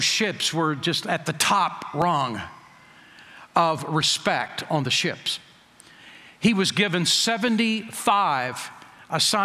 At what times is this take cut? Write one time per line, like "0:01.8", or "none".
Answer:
none